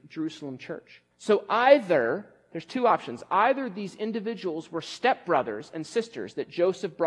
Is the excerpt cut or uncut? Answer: cut